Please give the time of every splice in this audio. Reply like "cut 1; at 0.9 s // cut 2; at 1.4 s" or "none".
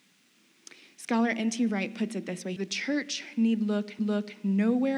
cut 1; at 2.6 s // cut 2; at 4.0 s